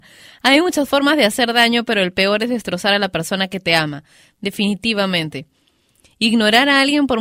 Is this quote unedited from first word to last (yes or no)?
yes